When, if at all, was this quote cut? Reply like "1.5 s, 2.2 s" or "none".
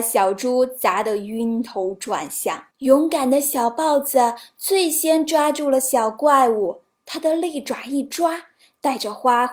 2.7 s